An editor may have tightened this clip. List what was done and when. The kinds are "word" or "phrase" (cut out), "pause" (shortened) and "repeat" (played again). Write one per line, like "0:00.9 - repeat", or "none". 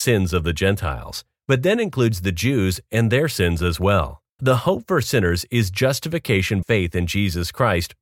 0:04.3 - pause
0:06.6 - word